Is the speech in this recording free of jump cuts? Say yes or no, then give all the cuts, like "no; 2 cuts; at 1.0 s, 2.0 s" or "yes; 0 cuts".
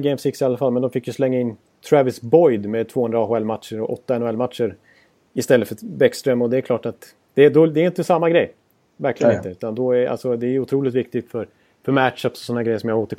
yes; 0 cuts